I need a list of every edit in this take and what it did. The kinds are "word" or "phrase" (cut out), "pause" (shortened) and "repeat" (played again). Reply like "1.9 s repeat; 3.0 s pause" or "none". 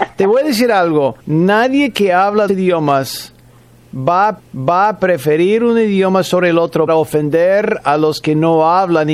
1.2 s pause; 2.5 s word; 4.4 s repeat; 6.9 s word